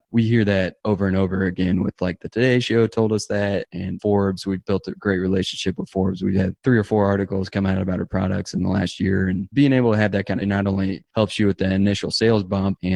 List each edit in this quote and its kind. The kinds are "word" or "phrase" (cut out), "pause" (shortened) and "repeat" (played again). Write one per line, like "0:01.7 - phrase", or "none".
0:10.4 - phrase